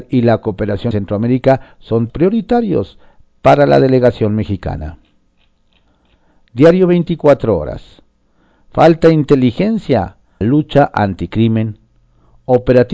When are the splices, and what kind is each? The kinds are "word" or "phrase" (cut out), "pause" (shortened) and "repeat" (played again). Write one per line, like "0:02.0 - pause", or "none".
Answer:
0:00.9 - word
0:02.1 - word
0:10.4 - word